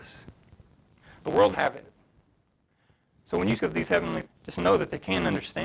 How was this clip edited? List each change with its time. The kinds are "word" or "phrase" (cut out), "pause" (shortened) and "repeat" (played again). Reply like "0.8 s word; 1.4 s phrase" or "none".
1.5 s word; 3.6 s word; 4.2 s word

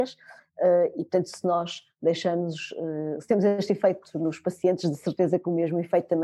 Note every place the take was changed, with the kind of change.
none

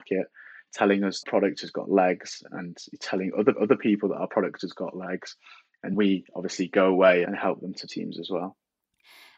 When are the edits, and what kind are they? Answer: 1.2 s phrase; 3.5 s repeat; 5.9 s word; 7.9 s phrase

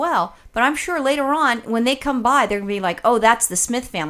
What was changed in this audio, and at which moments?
none

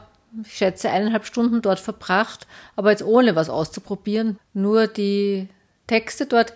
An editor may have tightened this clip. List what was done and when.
none

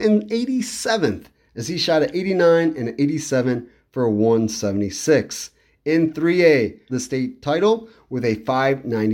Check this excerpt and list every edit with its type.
6.9 s phrase

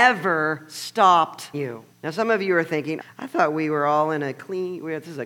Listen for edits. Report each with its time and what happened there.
1.5 s word; 1.9 s pause; 3.0 s word

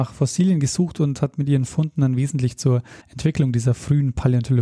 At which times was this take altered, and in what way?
3.0 s pause

